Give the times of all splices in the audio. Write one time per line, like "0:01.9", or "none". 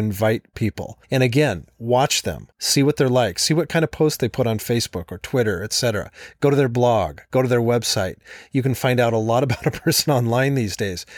0:01.0
0:02.5